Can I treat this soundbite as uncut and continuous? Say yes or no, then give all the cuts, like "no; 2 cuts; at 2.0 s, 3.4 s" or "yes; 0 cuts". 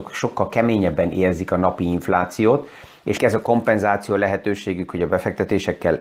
no; 1 cut; at 3.2 s